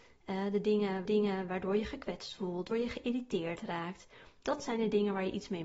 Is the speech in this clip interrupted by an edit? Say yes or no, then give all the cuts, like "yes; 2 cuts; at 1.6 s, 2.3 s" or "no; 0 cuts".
yes; 2 cuts; at 1.1 s, 2.7 s